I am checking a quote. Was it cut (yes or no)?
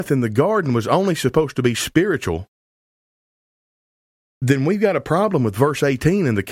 no